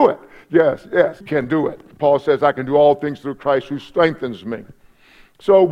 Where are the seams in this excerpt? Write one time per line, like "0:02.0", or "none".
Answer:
0:01.2
0:01.9